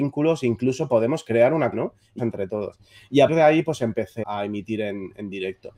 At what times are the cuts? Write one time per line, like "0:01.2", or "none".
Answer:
0:01.7
0:02.2
0:03.3
0:04.2